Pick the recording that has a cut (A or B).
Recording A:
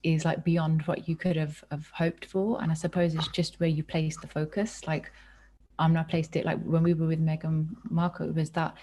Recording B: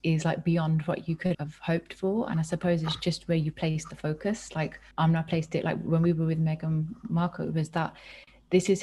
B